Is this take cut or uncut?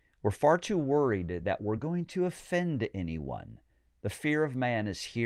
uncut